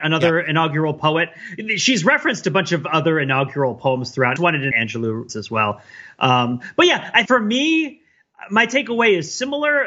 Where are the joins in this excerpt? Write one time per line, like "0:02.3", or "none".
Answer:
0:04.4
0:04.7
0:05.3
0:07.2